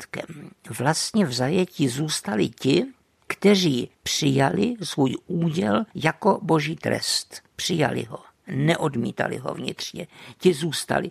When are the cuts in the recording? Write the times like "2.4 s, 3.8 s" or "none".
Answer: 3.9 s, 7.5 s